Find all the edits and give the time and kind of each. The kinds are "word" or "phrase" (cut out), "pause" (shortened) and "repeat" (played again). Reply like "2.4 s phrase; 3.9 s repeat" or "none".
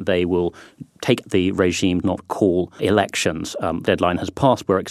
1.2 s phrase; 2.0 s word; 2.8 s word; 3.8 s word